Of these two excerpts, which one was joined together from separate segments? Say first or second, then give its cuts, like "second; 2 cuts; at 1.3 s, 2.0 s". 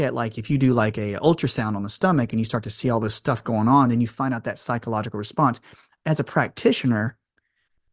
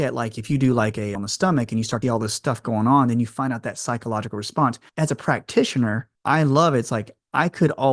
second; 4 cuts; at 1.2 s, 2.0 s, 4.9 s, 6.1 s